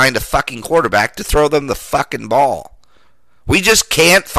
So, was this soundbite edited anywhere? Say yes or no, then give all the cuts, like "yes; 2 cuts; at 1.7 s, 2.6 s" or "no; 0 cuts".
no; 0 cuts